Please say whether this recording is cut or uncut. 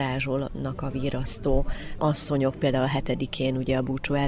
uncut